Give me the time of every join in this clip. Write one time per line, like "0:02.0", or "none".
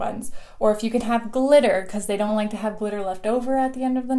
none